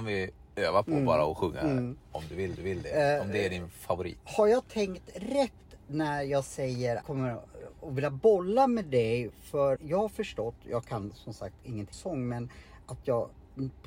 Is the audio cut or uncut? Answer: cut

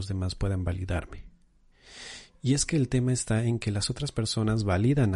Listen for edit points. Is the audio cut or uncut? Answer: uncut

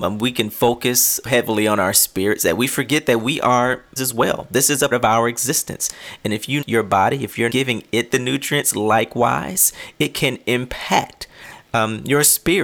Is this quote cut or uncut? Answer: cut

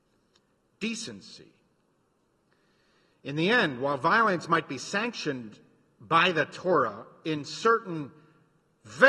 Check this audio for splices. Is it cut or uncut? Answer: uncut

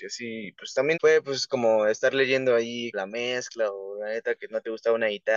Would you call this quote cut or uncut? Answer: cut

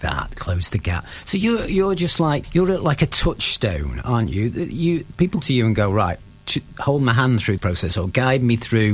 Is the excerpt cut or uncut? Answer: cut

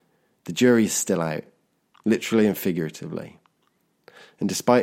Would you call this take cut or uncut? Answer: uncut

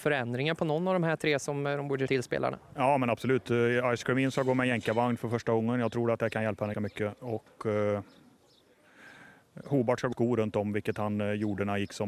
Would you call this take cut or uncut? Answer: cut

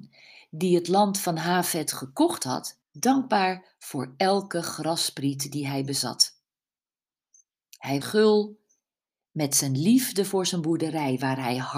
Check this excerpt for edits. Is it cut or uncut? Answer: cut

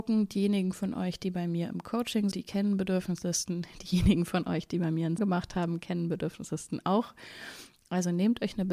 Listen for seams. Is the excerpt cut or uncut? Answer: cut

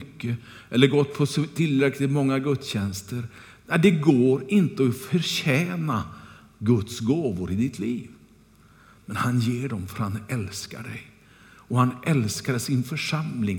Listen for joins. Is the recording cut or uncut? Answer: uncut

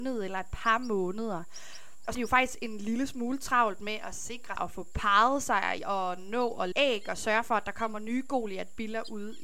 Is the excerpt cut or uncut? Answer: cut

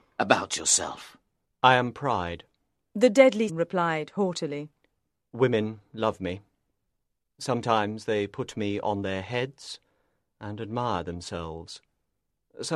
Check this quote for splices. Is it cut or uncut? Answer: cut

